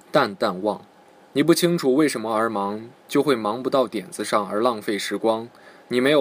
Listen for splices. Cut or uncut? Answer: cut